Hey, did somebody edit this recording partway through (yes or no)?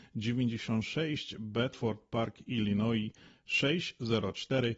no